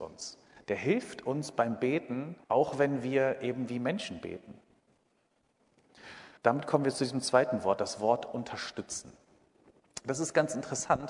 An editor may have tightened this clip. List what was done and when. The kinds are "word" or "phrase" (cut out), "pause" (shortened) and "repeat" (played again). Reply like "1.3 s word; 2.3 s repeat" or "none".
2.4 s pause; 6.4 s pause